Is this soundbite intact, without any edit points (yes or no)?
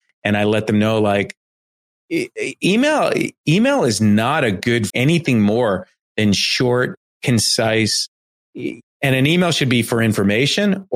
no